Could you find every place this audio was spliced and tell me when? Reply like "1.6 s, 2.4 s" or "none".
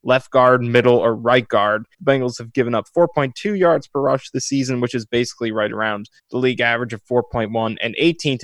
1.9 s, 6.2 s